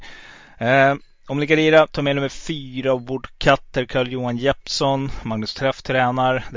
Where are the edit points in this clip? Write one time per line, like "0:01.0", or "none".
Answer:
none